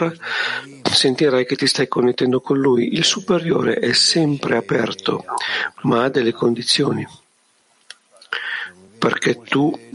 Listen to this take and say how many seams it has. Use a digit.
0